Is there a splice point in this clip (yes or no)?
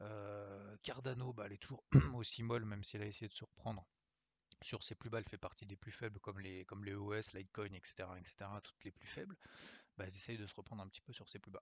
no